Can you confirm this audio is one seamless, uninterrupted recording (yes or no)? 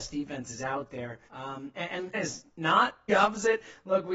no